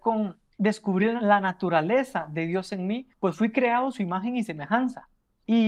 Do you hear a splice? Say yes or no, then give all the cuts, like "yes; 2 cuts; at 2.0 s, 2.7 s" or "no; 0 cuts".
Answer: yes; 1 cut; at 3.1 s